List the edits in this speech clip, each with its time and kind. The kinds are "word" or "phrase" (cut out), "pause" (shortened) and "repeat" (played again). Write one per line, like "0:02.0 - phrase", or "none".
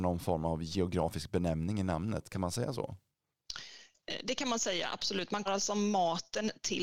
0:05.5 - word